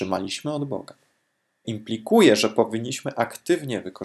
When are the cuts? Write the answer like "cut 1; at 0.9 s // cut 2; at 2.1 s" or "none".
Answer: cut 1; at 1.6 s